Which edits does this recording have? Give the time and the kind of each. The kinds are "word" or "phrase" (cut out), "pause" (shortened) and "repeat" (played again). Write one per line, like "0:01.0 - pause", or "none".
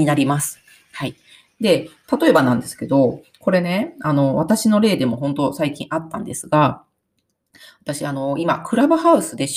none